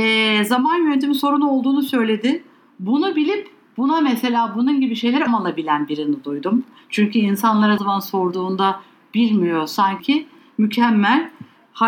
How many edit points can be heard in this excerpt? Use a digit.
3